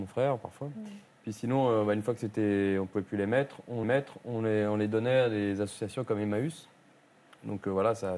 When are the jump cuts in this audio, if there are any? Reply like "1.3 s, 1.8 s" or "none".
3.8 s

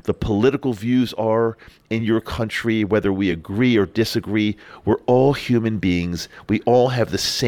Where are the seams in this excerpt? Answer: none

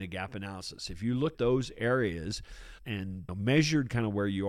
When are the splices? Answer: 1.3 s, 3.3 s

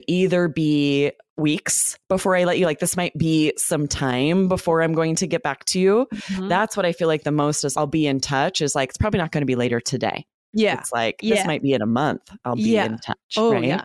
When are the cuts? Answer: 7.7 s

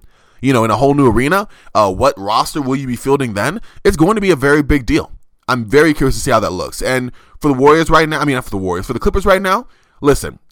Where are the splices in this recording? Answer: none

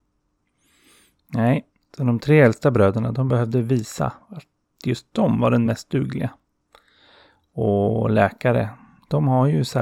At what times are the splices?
none

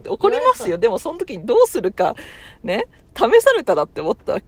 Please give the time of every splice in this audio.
none

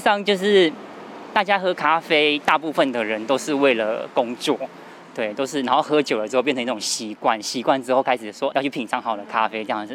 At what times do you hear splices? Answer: 8.5 s

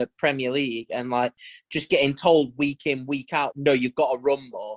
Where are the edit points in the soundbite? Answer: 3.5 s

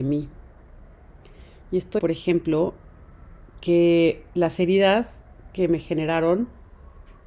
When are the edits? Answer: 2.0 s, 3.5 s

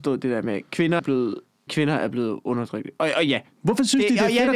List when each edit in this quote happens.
1.0 s, 1.7 s

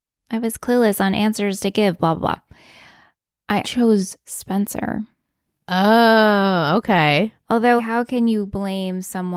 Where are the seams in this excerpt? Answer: 3.6 s, 7.8 s

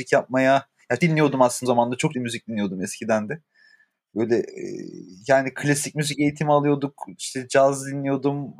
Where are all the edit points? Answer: 1.0 s, 1.6 s, 2.1 s

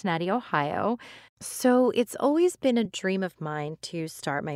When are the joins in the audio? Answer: none

